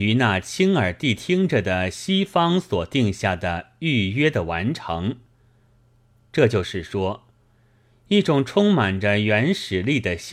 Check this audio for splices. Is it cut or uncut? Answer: uncut